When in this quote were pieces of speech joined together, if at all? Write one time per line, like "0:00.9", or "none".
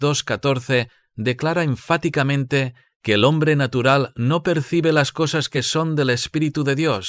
none